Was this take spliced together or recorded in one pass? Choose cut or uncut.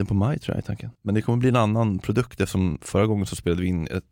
cut